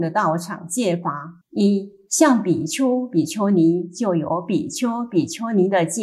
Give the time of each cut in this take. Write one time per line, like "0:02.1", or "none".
0:01.4